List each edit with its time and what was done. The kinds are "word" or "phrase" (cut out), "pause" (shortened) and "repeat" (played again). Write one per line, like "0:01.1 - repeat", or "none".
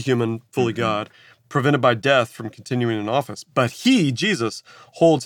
none